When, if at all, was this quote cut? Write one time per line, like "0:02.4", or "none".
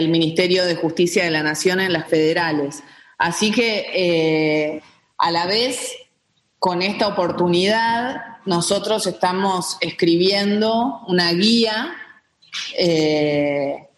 0:02.1